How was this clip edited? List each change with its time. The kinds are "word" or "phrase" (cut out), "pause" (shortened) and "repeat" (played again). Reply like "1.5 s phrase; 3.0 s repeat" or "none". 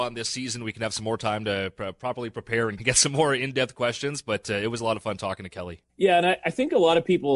2.8 s phrase; 5.9 s pause